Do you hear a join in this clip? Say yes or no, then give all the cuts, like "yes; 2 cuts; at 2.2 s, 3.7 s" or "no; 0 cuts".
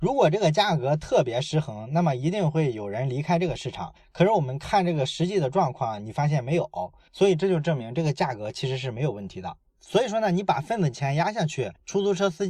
no; 0 cuts